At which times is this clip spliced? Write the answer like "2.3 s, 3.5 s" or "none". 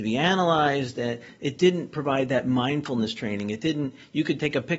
none